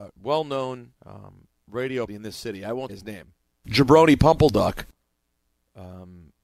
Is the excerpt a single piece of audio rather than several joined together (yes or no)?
no